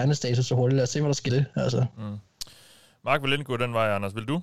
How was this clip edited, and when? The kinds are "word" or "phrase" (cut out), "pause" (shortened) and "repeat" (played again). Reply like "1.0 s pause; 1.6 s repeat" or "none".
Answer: 1.3 s word